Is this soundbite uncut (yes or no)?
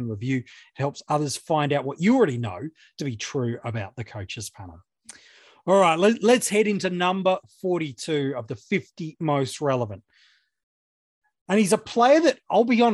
yes